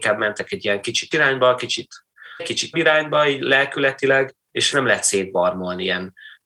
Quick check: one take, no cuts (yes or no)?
no